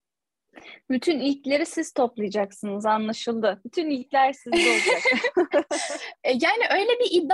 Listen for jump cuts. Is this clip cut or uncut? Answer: uncut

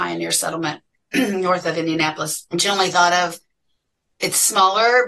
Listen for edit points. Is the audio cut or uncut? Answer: cut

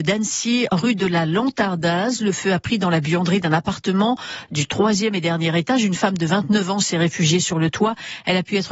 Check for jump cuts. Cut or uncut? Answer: uncut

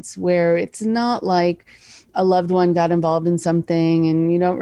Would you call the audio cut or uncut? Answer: uncut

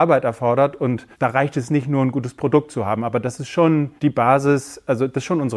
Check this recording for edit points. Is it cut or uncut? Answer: cut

